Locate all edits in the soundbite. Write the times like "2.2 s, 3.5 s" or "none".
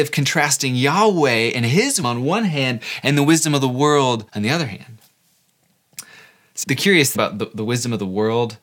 2.0 s, 4.3 s, 6.6 s, 7.1 s